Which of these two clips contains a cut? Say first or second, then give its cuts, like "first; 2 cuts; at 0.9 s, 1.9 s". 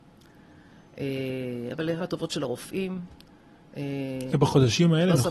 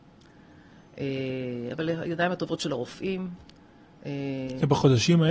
first; 1 cut; at 2.0 s